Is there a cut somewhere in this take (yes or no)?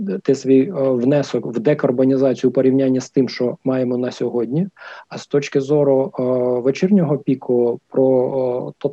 no